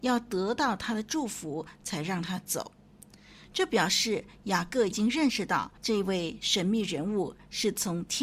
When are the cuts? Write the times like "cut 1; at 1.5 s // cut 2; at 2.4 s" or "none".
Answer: cut 1; at 5.8 s